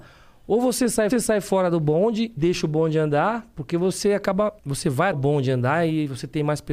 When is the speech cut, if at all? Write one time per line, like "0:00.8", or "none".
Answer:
0:01.1
0:02.4
0:04.6
0:05.1

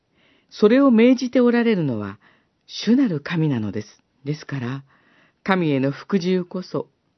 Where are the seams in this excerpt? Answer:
0:04.1

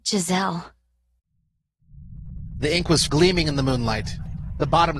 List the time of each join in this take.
0:03.1

